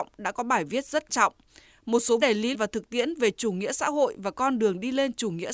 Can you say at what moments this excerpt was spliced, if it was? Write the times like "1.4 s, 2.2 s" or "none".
1.1 s, 2.2 s, 2.5 s